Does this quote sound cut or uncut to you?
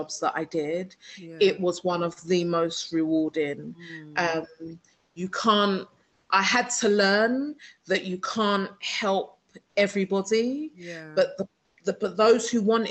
uncut